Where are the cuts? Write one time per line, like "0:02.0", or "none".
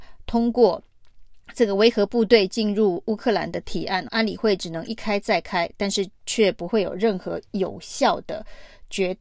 0:01.4
0:04.1